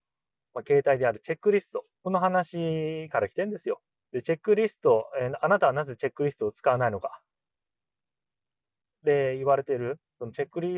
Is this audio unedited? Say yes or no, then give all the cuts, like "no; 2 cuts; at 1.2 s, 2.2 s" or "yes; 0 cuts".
no; 2 cuts; at 1.9 s, 3.9 s